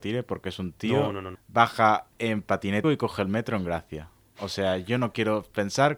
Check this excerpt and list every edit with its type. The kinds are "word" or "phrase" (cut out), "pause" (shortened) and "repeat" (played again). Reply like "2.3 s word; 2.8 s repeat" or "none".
1.3 s word; 2.1 s pause; 2.8 s word